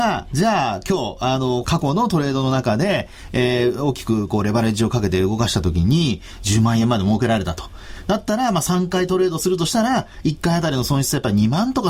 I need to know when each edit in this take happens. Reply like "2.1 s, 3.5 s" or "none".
1.6 s